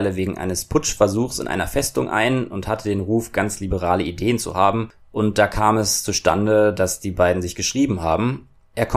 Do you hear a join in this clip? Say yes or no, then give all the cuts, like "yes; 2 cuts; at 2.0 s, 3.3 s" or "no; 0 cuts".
no; 0 cuts